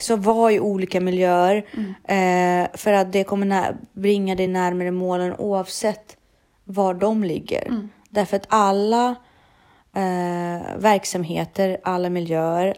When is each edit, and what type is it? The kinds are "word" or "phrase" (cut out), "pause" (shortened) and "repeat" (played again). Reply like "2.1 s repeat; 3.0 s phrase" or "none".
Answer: none